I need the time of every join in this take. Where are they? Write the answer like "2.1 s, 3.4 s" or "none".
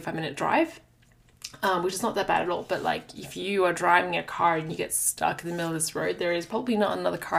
none